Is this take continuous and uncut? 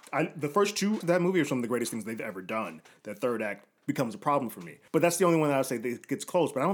no; 2 cuts; at 1.0 s, 4.9 s

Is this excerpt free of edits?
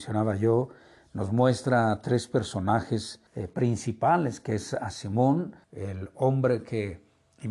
no; 2 cuts; at 3.3 s, 5.6 s

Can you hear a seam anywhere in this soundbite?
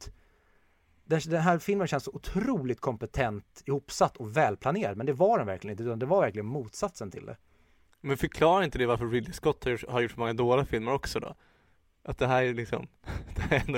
no; 0 cuts

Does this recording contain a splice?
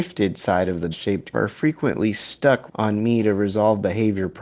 yes; 3 cuts; at 0.9 s, 1.3 s, 2.7 s

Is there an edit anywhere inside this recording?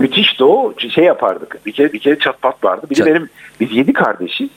yes; 1 cut; at 1.9 s

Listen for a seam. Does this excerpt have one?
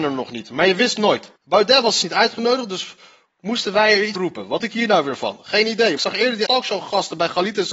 yes; 6 cuts; at 1.4 s, 2.0 s, 4.1 s, 4.6 s, 6.0 s, 6.5 s

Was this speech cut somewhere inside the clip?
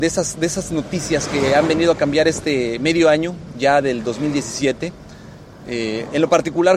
no; 0 cuts

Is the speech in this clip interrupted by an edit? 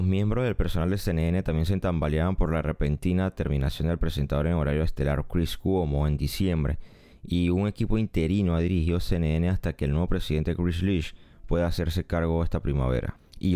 no; 0 cuts

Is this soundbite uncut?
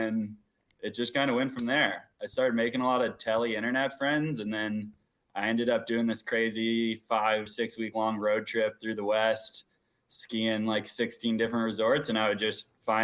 no; 1 cut; at 7.5 s

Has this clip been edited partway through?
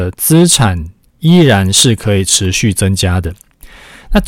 no; 0 cuts

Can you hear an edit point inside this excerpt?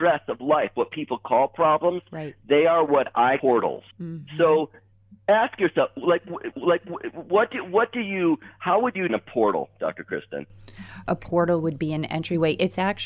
yes; 5 cuts; at 3.4 s, 3.9 s, 6.5 s, 9.1 s, 11.1 s

